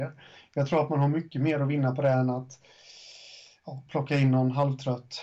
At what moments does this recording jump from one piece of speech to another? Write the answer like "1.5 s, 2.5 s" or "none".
none